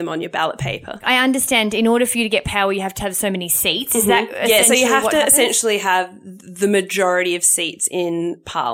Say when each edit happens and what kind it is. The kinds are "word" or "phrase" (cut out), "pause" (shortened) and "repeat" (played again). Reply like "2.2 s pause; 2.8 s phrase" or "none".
none